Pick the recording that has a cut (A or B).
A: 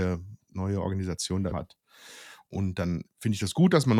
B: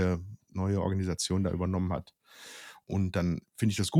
A